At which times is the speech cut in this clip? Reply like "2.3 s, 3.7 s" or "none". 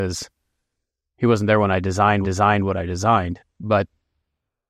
2.2 s